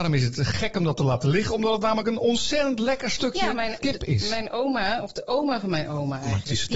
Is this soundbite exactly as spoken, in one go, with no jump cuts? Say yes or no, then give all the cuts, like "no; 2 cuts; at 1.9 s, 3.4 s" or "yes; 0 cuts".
no; 1 cut; at 3.8 s